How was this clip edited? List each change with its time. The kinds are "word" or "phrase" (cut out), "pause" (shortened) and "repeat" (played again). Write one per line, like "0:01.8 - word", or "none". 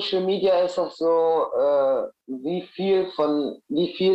0:02.2 - pause

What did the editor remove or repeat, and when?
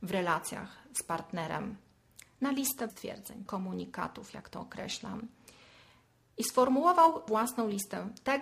0:02.9 - word
0:03.5 - word
0:07.3 - word

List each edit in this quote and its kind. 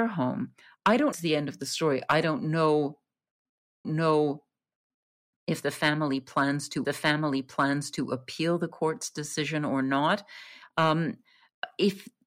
0:01.1 - phrase
0:03.8 - repeat
0:06.8 - repeat

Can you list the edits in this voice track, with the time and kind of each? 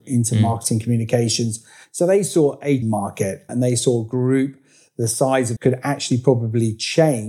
0:02.8 - word
0:03.5 - word
0:05.6 - word

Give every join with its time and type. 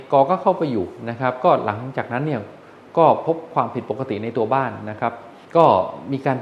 0:05.4 - pause

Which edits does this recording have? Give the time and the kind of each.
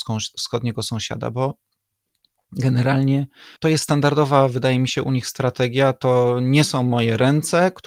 0:03.6 - pause

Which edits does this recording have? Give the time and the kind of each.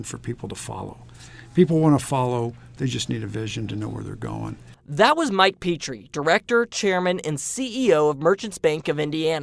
none

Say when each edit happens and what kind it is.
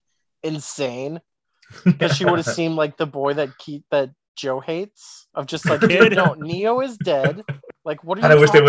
0:05.3 - pause

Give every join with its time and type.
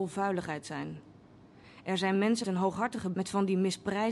0:02.4 - word
0:03.1 - word

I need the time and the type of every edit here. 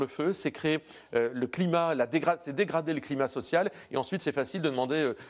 none

